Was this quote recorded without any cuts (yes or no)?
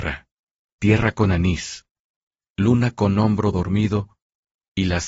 yes